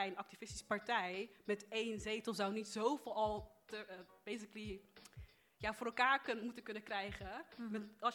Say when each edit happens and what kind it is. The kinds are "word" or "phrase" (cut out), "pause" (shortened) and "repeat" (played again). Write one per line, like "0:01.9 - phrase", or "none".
none